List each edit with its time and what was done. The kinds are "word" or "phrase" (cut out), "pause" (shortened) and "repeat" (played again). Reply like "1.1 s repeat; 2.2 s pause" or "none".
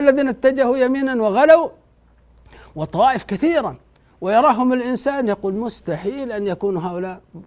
none